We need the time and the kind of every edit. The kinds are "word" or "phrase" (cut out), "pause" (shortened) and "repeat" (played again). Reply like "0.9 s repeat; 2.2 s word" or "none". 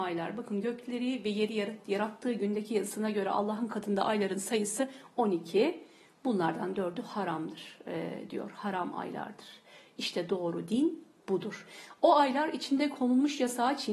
none